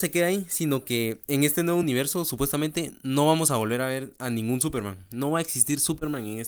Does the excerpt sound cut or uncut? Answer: uncut